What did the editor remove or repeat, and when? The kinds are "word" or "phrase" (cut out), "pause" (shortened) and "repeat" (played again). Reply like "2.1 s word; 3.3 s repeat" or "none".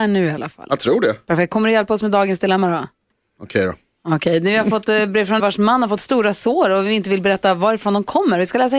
5.4 s word